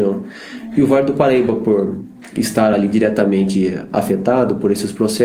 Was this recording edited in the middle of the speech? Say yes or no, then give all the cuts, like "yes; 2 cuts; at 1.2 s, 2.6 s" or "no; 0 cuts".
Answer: no; 0 cuts